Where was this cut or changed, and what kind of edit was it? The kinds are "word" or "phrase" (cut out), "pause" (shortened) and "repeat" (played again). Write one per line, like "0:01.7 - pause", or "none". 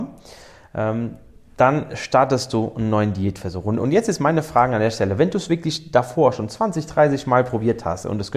0:01.4 - pause